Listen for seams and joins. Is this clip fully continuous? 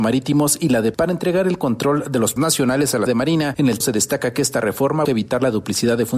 no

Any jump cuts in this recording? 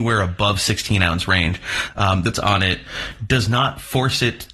yes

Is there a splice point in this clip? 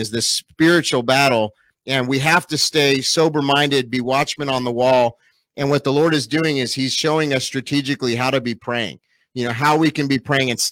no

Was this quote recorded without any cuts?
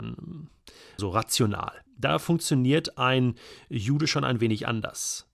no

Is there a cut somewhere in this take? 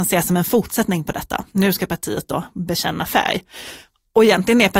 no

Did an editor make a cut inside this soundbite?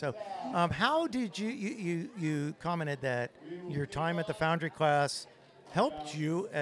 no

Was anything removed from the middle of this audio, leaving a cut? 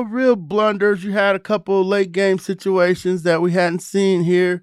no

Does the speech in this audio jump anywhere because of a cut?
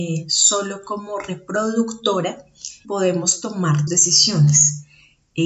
yes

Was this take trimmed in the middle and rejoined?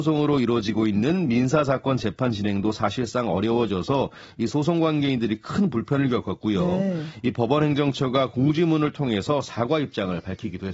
no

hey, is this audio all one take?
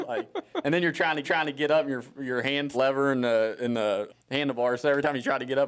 no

